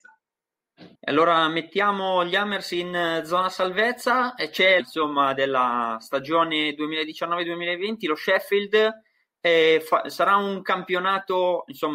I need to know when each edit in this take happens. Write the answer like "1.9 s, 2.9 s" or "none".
1.0 s, 4.8 s